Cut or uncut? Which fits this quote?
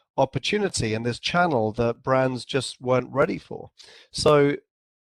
uncut